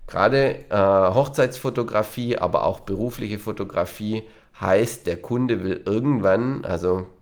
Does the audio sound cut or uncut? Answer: uncut